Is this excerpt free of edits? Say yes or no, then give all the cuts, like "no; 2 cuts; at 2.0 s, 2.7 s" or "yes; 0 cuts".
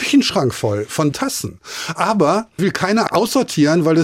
no; 3 cuts; at 1.1 s, 2.6 s, 3.1 s